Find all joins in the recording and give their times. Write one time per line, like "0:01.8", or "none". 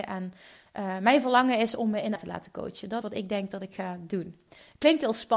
0:02.2
0:03.0